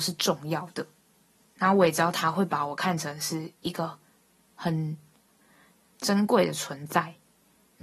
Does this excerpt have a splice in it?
no; 0 cuts

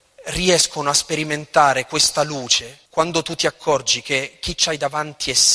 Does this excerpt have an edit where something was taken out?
yes; 1 cut; at 2.9 s

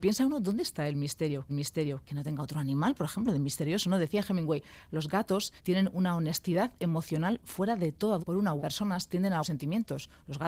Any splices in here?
yes; 5 cuts; at 1.5 s, 5.6 s, 8.2 s, 8.6 s, 9.4 s

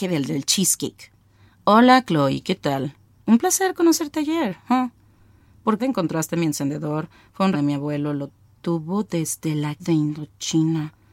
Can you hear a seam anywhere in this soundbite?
yes; 3 cuts; at 5.8 s, 7.5 s, 9.8 s

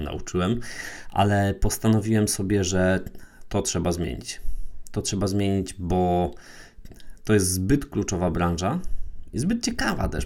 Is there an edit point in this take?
no; 0 cuts

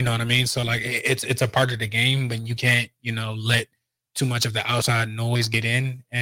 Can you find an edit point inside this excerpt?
no; 0 cuts

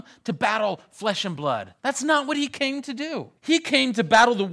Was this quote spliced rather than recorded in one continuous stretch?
yes; 2 cuts; at 1.8 s, 3.4 s

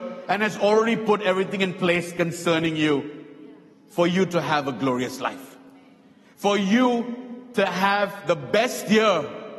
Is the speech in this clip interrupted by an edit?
no; 0 cuts

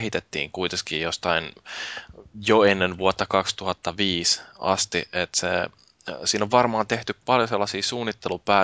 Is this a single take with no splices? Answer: yes; 0 cuts

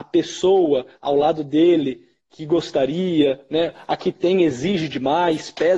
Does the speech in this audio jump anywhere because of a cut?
no; 0 cuts

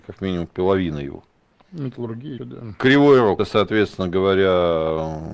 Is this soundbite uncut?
no; 2 cuts; at 2.4 s, 3.4 s

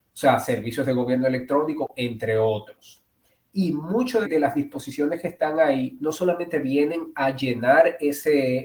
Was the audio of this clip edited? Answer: yes; 1 cut; at 4.2 s

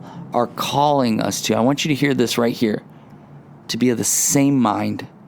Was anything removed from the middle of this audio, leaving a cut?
no; 0 cuts

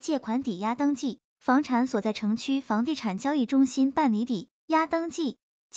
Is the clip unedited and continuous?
no; 1 cut; at 4.6 s

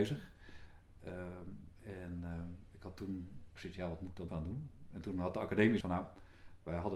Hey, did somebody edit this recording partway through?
yes; 3 cuts; at 3.6 s, 4.3 s, 5.8 s

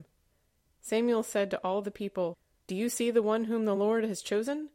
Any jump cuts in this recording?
no; 0 cuts

